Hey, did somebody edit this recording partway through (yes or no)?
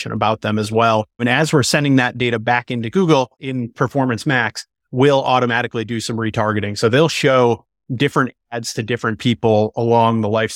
no